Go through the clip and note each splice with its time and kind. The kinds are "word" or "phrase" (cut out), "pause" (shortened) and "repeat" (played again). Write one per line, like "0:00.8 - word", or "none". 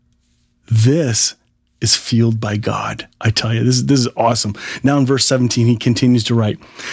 0:03.1 - pause